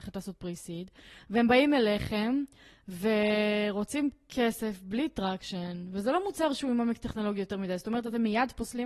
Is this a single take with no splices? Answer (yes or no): yes